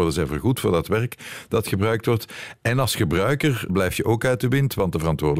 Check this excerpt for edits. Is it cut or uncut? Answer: cut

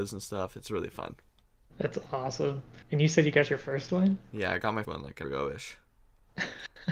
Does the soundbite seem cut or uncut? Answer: cut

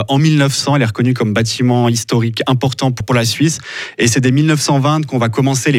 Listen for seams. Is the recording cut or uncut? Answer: cut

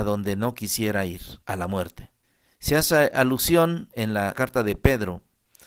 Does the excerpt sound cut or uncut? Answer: cut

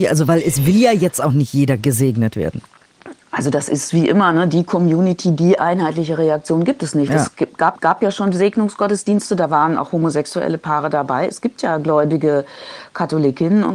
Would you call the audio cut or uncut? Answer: cut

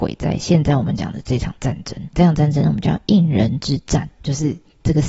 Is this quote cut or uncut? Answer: cut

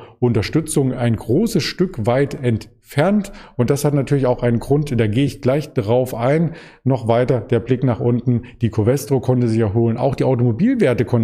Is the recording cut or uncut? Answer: uncut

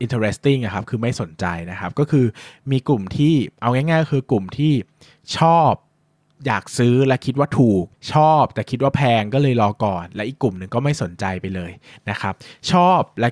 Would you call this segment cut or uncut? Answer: uncut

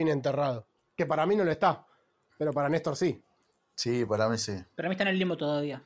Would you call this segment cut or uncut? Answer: uncut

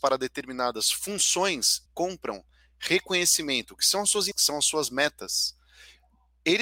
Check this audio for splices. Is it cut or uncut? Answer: cut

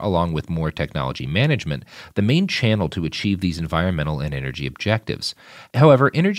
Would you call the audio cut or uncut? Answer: uncut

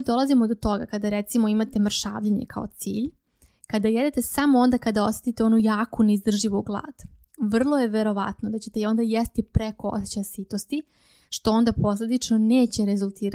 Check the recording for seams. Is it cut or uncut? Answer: uncut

